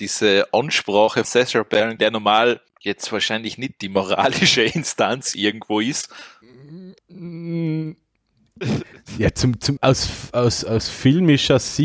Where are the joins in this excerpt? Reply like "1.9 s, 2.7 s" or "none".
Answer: 1.2 s, 2.0 s, 2.7 s, 7.0 s, 9.8 s